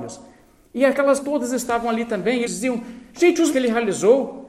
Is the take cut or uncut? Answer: cut